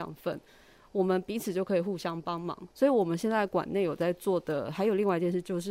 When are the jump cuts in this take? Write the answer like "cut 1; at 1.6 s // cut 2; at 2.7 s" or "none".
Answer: cut 1; at 2.7 s

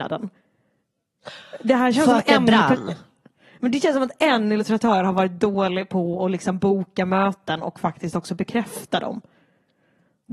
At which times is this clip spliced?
none

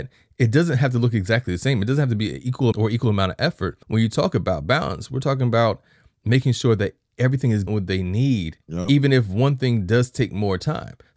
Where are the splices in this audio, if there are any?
cut 1; at 2.7 s // cut 2; at 3.8 s // cut 3; at 7.7 s // cut 4; at 8.6 s

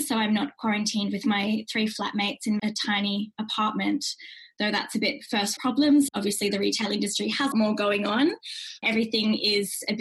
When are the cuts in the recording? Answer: cut 1; at 2.6 s // cut 2; at 5.6 s // cut 3; at 7.5 s

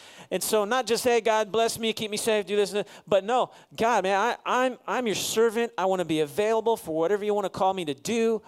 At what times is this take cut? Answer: none

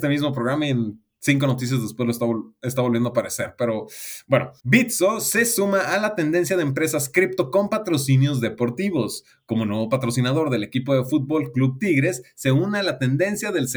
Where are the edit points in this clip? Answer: cut 1; at 4.6 s

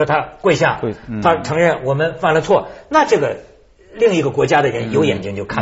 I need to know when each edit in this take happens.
none

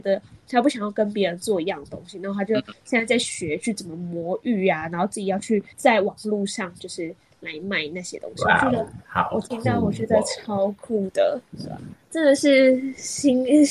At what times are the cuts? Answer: cut 1; at 5.7 s // cut 2; at 9.0 s // cut 3; at 11.5 s

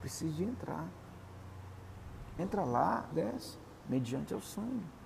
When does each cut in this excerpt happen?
cut 1; at 2.4 s // cut 2; at 3.1 s

